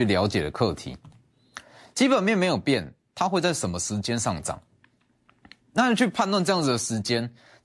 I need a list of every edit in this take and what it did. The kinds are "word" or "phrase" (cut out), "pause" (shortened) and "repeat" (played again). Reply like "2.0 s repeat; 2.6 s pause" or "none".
none